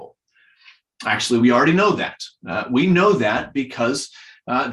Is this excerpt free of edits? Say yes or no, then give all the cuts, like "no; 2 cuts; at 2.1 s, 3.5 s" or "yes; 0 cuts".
yes; 0 cuts